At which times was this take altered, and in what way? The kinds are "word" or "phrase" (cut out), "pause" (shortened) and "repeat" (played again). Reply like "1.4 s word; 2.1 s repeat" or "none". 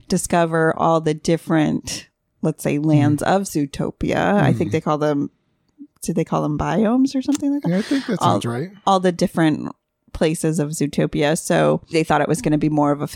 11.9 s word